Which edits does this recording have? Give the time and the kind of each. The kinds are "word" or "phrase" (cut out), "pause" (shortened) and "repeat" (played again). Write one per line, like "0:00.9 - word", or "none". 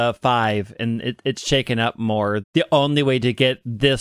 0:02.4 - word